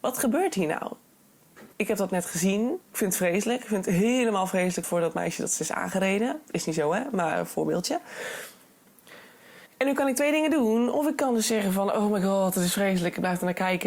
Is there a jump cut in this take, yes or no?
yes